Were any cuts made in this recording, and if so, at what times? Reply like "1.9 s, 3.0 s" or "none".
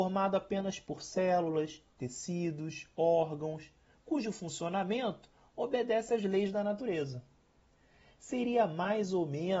none